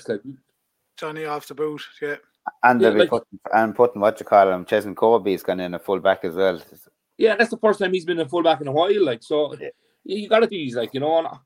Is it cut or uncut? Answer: cut